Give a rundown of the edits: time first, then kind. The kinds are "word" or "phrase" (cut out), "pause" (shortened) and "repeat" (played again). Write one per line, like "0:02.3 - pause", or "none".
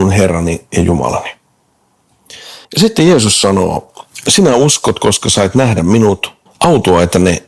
0:02.6 - pause
0:06.5 - pause

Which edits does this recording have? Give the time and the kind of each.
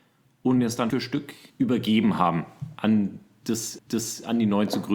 0:00.9 - word
0:01.5 - pause
0:03.8 - repeat

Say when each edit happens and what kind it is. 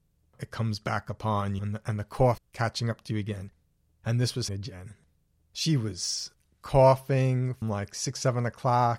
0:01.6 - word
0:02.4 - word
0:04.5 - word
0:07.6 - word

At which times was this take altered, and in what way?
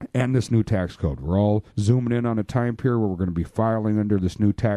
0:01.7 - pause

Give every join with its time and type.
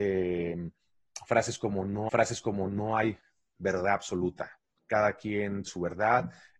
0:02.1 - repeat
0:04.8 - pause
0:05.7 - word

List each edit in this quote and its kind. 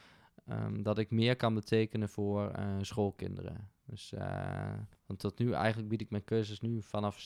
0:04.9 - pause

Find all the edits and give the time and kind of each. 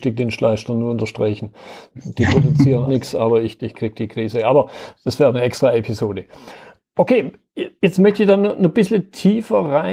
0:02.9 - word
0:03.6 - word

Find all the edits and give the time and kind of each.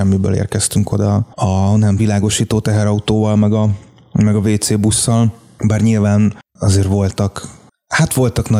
0:02.0 - word

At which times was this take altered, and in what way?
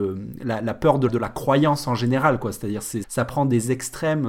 0:01.1 - word
0:03.0 - word

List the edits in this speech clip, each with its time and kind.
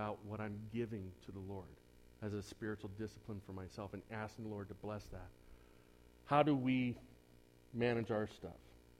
none

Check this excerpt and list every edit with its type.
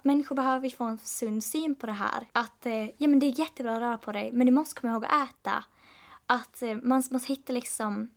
0:02.3 - pause

